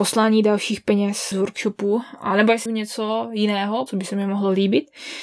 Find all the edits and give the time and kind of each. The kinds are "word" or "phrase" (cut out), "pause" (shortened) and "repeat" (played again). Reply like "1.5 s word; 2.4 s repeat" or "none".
1.3 s word; 2.7 s word; 3.9 s word